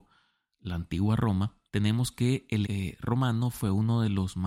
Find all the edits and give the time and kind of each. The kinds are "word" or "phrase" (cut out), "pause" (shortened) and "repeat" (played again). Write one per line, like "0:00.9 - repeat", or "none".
0:01.7 - pause
0:02.6 - word